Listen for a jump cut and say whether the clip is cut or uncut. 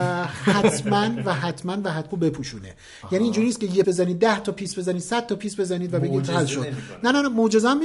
cut